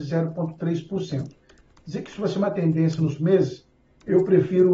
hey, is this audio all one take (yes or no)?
no